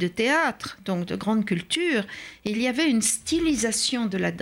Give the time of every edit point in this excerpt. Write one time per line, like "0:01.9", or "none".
none